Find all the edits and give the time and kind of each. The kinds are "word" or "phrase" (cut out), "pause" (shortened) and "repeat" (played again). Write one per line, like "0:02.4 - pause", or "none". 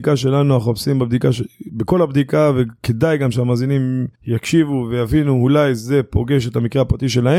0:01.5 - pause
0:04.2 - pause